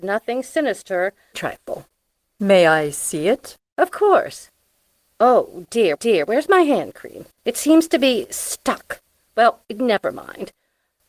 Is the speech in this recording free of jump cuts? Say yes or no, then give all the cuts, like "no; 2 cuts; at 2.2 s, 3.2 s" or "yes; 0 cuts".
no; 5 cuts; at 1.3 s, 3.6 s, 6.0 s, 7.3 s, 9.6 s